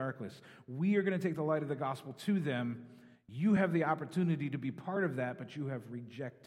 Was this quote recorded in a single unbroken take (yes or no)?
yes